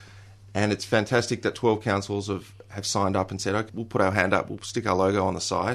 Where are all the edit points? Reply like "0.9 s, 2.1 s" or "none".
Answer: 3.7 s